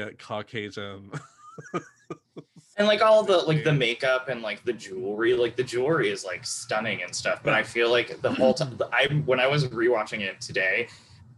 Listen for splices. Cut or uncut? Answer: uncut